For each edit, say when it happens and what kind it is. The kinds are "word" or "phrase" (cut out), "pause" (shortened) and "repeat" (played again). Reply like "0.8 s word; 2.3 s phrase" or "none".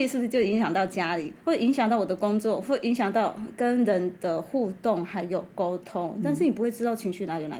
1.4 s pause